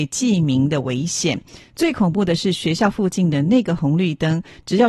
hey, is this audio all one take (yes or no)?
yes